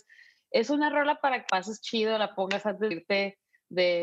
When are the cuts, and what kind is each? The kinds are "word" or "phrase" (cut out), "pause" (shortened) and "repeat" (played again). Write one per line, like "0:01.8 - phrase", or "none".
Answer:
0:01.5 - word
0:02.9 - word